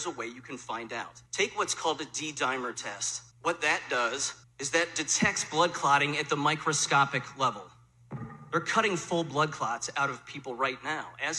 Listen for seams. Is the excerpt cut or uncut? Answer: cut